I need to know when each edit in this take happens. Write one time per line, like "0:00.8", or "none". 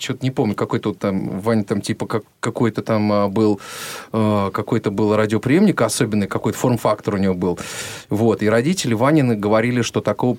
none